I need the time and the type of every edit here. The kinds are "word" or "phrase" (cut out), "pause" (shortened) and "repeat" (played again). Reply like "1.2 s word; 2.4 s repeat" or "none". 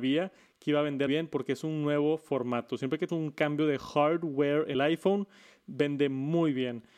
1.1 s word; 3.1 s word; 4.7 s word